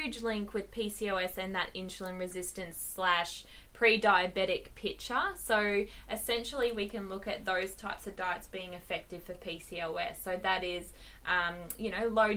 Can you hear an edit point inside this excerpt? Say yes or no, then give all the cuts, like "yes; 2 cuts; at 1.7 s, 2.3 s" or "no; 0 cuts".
no; 0 cuts